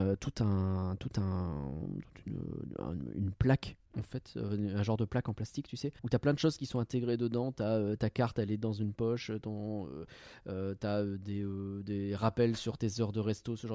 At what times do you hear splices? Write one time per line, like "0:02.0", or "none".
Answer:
0:06.0